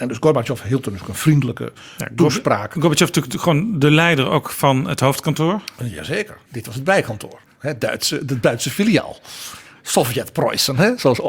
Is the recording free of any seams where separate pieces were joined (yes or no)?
yes